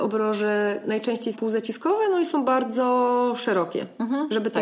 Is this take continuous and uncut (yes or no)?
no